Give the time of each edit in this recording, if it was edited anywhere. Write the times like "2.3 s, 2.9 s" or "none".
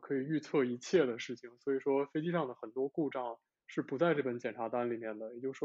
none